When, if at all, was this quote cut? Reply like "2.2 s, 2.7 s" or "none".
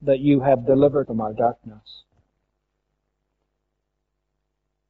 1.0 s